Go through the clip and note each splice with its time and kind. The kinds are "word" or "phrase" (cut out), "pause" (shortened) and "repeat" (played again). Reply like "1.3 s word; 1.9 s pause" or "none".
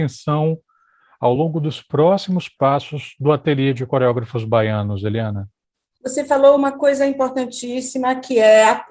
none